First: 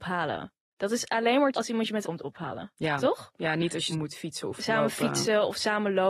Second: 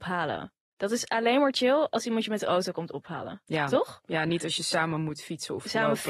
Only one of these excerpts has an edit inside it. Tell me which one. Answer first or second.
first